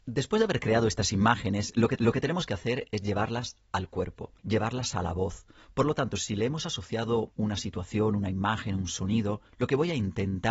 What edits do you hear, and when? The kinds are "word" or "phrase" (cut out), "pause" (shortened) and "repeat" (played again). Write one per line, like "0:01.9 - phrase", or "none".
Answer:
0:02.0 - repeat
0:04.4 - pause